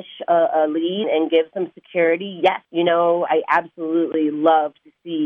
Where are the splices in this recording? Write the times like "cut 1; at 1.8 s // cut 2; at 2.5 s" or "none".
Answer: cut 1; at 1.0 s // cut 2; at 2.6 s // cut 3; at 3.3 s